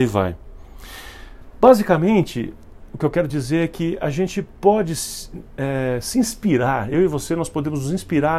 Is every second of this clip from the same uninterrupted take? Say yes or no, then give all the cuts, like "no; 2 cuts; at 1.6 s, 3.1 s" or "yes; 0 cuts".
yes; 0 cuts